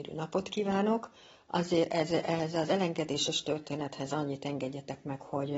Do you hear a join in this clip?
no; 0 cuts

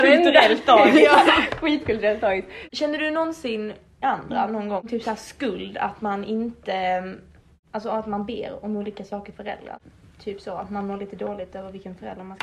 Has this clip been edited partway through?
yes; 2 cuts; at 4.0 s, 9.3 s

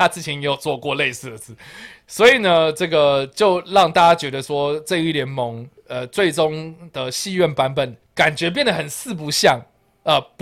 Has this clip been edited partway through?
yes; 2 cuts; at 5.8 s, 8.0 s

